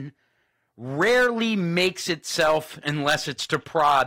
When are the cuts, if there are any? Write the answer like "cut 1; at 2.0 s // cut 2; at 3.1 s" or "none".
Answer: cut 1; at 2.8 s